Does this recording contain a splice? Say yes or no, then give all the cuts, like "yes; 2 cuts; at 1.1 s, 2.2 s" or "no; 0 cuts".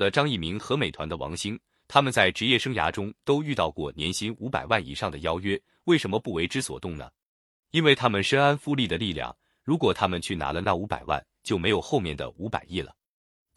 no; 0 cuts